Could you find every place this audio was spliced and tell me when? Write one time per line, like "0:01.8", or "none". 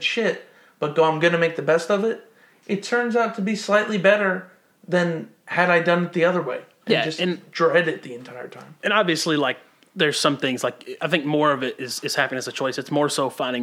none